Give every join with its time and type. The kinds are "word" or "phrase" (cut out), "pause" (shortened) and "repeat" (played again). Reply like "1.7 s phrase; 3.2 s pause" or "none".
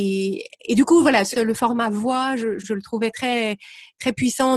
1.3 s phrase; 2.6 s word